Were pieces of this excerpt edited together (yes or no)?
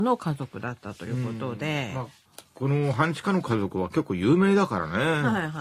no